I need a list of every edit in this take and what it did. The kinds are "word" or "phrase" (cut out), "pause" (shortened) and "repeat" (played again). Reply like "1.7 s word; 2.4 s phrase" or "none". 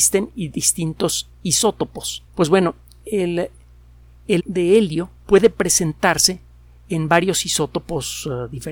2.3 s pause; 4.4 s word; 5.2 s pause

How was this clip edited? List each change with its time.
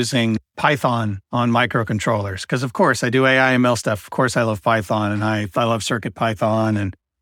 none

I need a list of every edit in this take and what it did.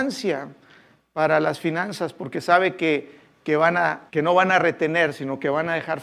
4.1 s pause

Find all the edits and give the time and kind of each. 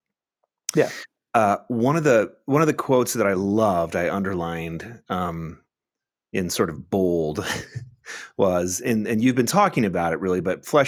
none

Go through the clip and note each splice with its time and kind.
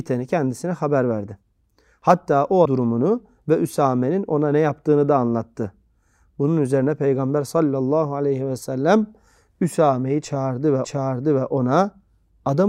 2.7 s word; 10.8 s repeat

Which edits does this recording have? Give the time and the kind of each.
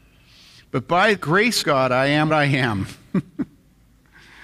1.2 s word; 1.6 s word; 2.3 s word

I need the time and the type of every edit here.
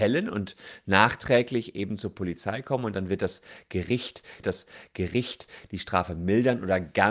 4.4 s repeat

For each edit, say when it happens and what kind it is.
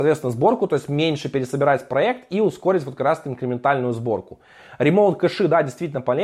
none

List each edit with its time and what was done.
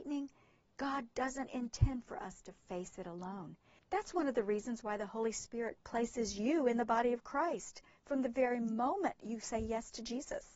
3.8 s pause

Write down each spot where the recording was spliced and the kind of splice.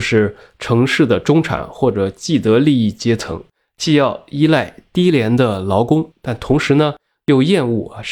none

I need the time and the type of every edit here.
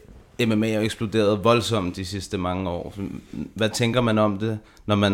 none

